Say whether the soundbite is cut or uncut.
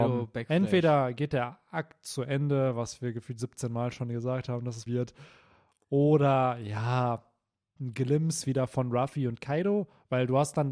cut